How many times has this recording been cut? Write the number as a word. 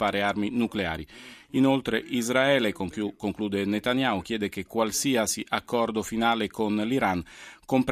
zero